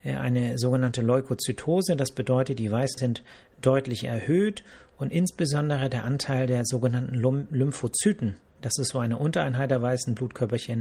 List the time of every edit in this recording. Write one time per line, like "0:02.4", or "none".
0:03.0